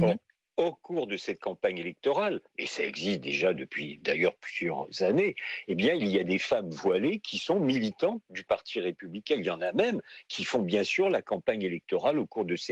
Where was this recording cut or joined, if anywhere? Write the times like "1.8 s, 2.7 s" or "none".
2.5 s